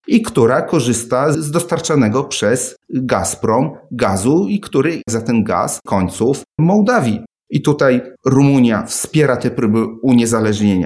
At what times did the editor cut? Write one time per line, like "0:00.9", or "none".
0:01.3
0:02.8
0:05.1
0:05.9
0:06.5
0:08.2